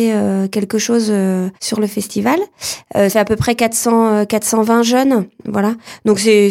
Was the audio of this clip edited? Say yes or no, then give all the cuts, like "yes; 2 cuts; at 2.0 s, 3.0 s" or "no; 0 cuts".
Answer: yes; 2 cuts; at 1.6 s, 3.1 s